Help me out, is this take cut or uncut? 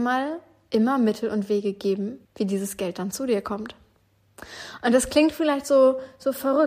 cut